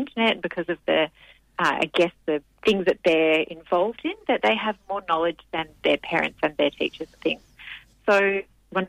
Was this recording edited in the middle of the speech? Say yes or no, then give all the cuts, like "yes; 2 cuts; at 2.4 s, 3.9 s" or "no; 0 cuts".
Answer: no; 0 cuts